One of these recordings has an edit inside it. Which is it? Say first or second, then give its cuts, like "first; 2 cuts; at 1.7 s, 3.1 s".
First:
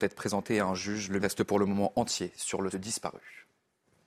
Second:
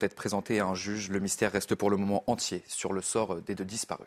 first; 2 cuts; at 1.2 s, 2.7 s